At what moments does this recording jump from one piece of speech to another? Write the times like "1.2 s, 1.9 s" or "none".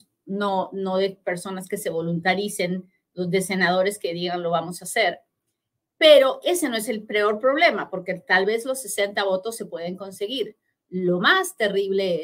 none